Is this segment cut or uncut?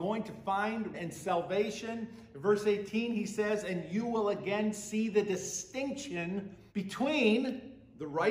cut